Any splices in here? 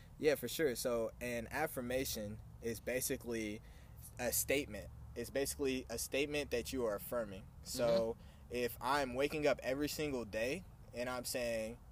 no; 0 cuts

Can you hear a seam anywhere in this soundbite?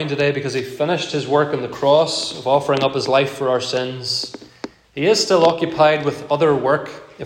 no; 0 cuts

